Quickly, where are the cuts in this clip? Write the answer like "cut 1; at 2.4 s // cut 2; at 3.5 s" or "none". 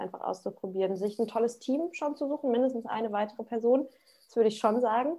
none

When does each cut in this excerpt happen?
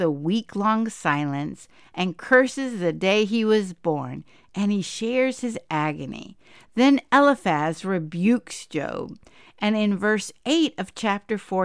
none

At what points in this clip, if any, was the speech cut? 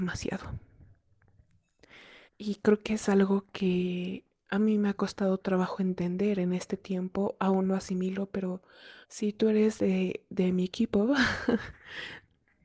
cut 1; at 2.3 s // cut 2; at 9.0 s

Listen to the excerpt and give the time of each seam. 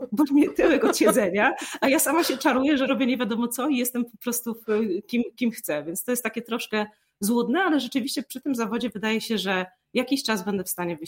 none

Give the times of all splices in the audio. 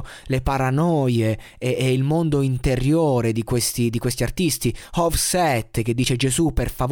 none

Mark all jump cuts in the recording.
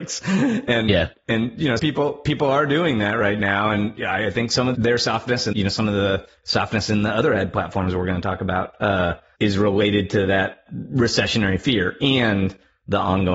cut 1; at 1.8 s // cut 2; at 4.7 s // cut 3; at 5.5 s // cut 4; at 9.3 s

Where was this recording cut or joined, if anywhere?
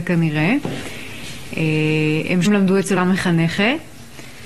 cut 1; at 2.5 s // cut 2; at 3.0 s

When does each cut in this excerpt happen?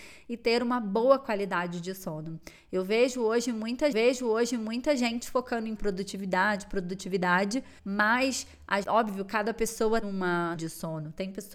cut 1; at 3.9 s // cut 2; at 5.8 s // cut 3; at 7.8 s // cut 4; at 8.8 s // cut 5; at 10.0 s // cut 6; at 10.5 s

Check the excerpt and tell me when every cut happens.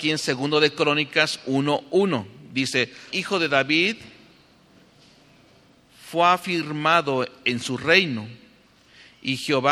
cut 1; at 3.1 s

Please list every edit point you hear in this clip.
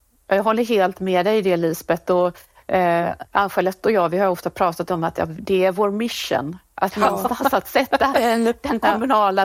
cut 1; at 3.3 s

